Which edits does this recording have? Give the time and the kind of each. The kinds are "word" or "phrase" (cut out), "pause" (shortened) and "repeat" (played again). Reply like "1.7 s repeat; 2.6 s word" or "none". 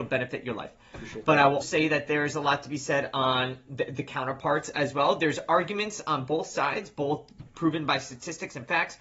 1.6 s word